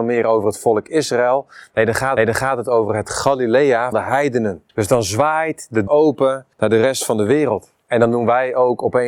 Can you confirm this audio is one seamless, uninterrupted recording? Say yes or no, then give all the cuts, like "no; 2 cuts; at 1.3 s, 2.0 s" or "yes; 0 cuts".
no; 6 cuts; at 2.2 s, 3.9 s, 4.7 s, 5.9 s, 6.5 s, 7.8 s